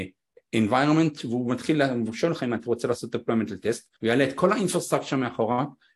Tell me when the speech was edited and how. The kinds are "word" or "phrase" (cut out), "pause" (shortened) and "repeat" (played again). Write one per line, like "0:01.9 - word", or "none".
0:04.0 - pause